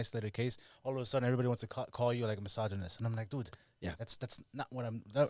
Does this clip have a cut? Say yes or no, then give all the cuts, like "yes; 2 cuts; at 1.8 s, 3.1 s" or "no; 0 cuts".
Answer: no; 0 cuts